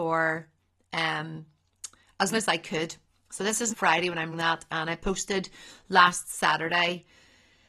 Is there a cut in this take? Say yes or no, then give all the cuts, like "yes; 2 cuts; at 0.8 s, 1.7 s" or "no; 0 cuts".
yes; 3 cuts; at 2.3 s, 3.7 s, 4.3 s